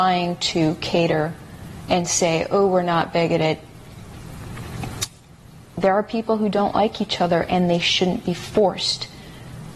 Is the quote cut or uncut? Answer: uncut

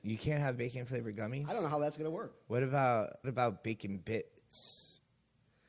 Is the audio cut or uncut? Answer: cut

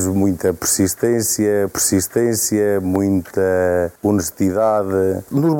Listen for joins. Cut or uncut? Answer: cut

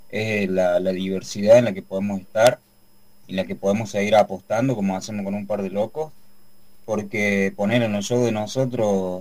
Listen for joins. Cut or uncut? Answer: uncut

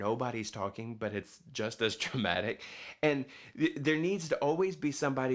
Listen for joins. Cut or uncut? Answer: uncut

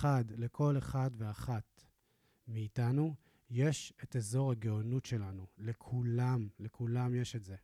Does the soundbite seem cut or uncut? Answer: uncut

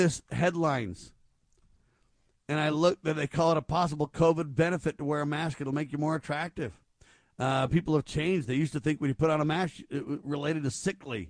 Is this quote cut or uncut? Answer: uncut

